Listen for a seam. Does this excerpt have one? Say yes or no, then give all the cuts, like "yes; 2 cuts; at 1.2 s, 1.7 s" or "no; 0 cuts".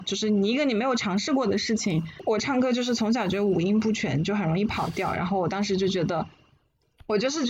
no; 0 cuts